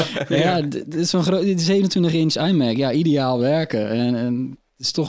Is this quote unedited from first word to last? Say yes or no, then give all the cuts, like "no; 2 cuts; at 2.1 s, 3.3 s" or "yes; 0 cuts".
yes; 0 cuts